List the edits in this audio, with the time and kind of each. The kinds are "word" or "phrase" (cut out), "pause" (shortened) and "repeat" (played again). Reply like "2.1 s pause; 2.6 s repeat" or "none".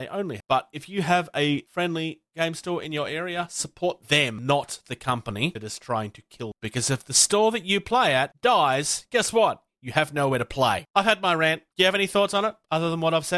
4.0 s pause; 11.7 s pause

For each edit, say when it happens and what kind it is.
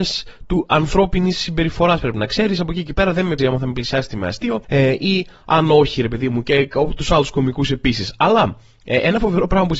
3.4 s word

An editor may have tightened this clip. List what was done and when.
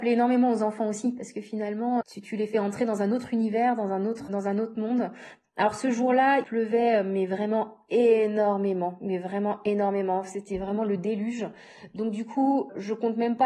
2.0 s word; 4.3 s word; 6.4 s word

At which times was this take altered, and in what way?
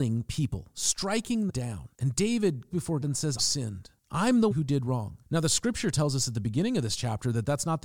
1.5 s word; 1.9 s pause; 2.7 s word; 3.0 s word; 3.4 s phrase; 4.0 s pause; 4.5 s word; 5.2 s pause

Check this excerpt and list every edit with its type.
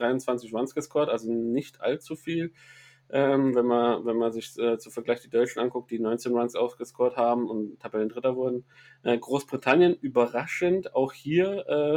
none

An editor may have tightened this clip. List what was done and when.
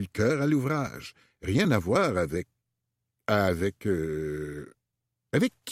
none

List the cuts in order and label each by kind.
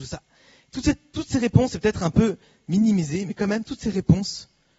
none

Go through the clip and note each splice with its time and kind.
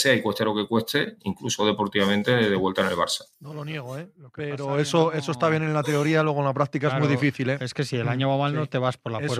3.3 s pause

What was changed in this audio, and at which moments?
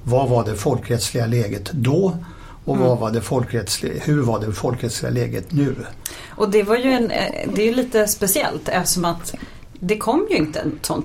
none

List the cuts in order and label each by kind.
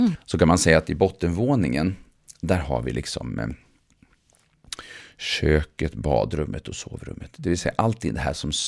none

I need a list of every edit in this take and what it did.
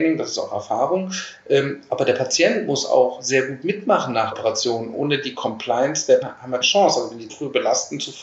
4.3 s word; 6.2 s word; 6.6 s word; 7.3 s word

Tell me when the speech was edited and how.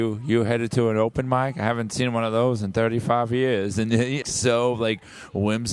4.2 s word

